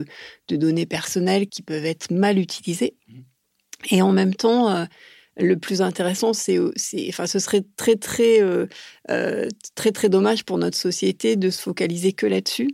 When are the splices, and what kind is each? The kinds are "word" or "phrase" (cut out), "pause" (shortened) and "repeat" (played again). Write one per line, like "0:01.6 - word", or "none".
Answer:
0:01.5 - word